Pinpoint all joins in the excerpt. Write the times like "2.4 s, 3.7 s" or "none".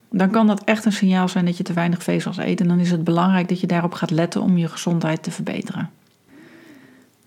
none